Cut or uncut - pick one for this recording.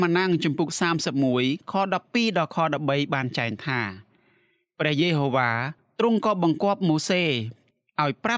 uncut